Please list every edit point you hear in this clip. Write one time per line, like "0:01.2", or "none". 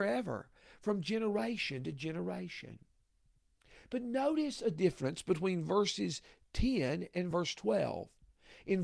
none